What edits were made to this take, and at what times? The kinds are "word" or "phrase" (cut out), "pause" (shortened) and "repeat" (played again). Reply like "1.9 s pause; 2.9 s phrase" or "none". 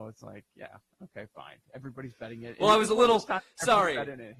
none